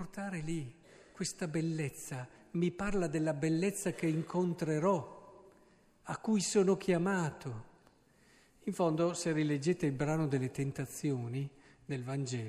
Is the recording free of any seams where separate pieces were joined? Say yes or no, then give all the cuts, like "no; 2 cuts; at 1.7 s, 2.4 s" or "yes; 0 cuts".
yes; 0 cuts